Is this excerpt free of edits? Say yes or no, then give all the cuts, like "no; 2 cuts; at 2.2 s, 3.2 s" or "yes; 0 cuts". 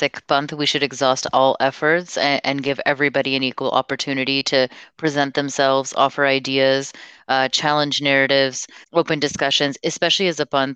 no; 1 cut; at 8.8 s